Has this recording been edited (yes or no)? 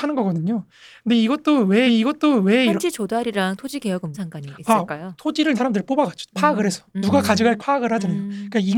yes